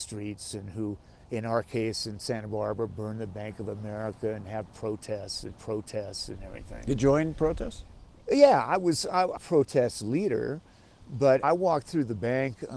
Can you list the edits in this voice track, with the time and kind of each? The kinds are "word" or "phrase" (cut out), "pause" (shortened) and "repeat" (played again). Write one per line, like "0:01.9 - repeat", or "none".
0:05.5 - repeat
0:07.0 - word
0:09.4 - phrase
0:11.4 - word